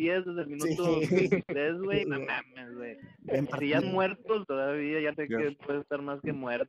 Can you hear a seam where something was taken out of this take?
yes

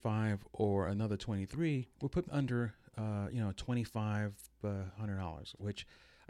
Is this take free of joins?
no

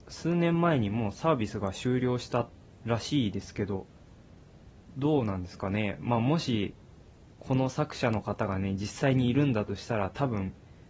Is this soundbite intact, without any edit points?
yes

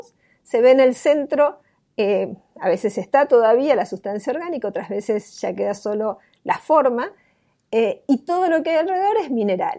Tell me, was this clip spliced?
no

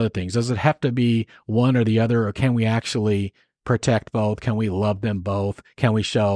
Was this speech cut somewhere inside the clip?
no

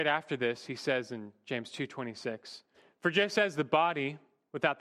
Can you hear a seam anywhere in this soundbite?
yes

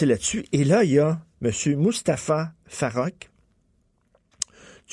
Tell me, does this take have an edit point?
no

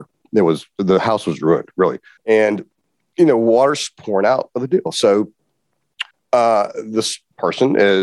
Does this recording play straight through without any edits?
no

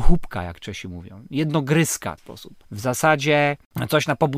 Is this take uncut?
no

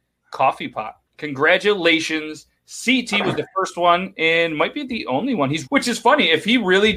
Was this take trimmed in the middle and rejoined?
yes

